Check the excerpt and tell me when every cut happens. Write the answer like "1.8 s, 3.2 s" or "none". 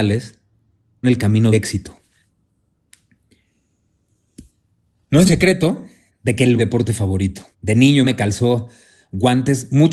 1.0 s, 1.5 s, 5.3 s, 6.1 s, 6.6 s, 7.5 s, 8.0 s

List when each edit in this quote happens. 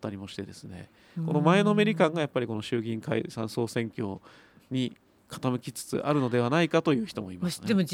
none

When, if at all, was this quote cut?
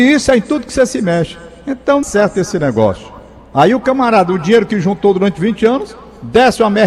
2.0 s

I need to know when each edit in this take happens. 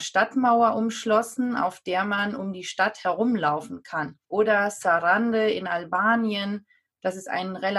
4.2 s

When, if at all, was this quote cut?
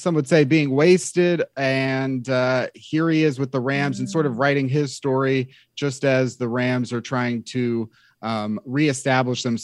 none

